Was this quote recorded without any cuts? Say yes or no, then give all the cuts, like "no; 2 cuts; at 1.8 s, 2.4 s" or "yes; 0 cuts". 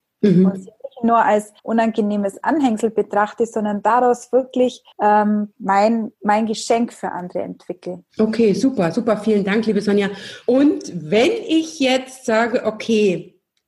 no; 5 cuts; at 1.6 s, 4.9 s, 6.1 s, 8.1 s, 10.4 s